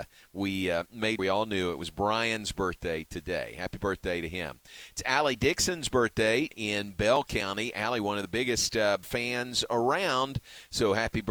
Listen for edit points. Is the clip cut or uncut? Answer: cut